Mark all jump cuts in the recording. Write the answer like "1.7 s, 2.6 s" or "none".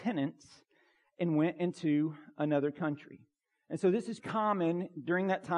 4.2 s